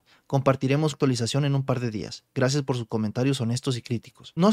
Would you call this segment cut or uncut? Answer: cut